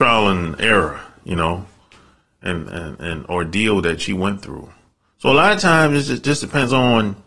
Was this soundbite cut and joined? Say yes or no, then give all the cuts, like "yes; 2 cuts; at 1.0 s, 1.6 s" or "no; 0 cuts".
no; 0 cuts